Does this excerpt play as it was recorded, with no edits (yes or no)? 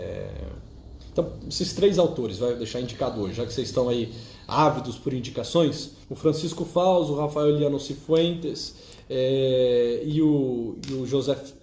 no